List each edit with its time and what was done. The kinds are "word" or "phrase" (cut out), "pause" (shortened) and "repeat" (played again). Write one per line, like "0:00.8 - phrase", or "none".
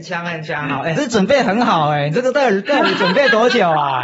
0:00.9 - phrase